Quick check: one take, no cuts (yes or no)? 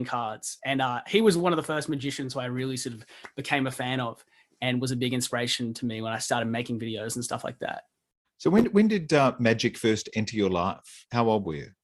no